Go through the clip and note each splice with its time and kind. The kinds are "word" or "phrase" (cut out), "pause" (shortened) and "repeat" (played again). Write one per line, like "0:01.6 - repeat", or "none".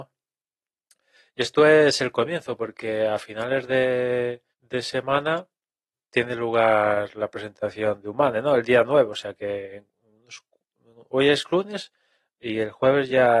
0:04.5 - pause
0:06.1 - word
0:08.0 - word